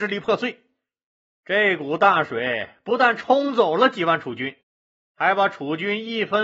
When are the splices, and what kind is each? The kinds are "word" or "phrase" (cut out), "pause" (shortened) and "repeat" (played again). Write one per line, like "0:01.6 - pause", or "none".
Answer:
none